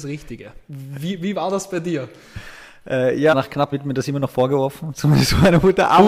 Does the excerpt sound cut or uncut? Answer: cut